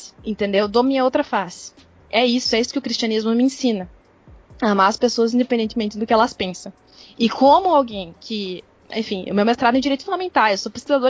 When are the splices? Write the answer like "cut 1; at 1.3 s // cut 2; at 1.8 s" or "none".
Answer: none